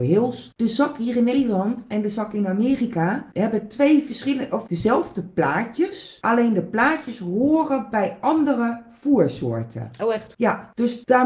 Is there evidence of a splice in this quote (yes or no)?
yes